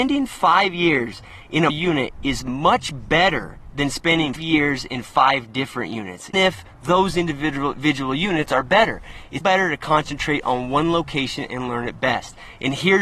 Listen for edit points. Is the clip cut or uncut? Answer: cut